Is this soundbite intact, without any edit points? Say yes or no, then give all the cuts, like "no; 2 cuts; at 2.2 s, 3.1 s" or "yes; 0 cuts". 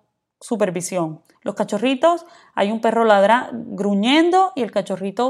yes; 0 cuts